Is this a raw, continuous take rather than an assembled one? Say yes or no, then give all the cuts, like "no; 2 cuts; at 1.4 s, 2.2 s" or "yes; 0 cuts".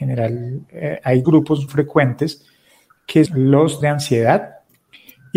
no; 4 cuts; at 1.2 s, 1.7 s, 3.3 s, 3.8 s